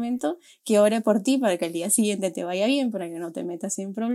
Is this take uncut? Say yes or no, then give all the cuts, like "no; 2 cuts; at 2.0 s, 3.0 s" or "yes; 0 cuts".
yes; 0 cuts